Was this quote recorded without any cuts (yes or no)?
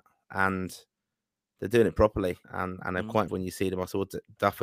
no